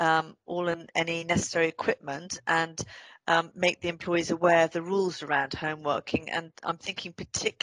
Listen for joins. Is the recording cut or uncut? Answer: uncut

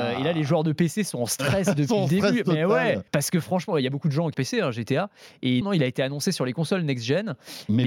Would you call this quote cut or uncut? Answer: cut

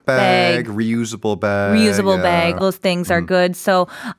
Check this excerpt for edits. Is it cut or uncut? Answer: cut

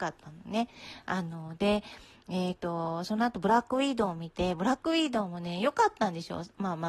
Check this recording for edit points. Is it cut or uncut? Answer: uncut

